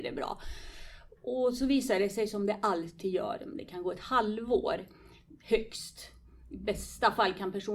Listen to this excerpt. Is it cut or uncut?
uncut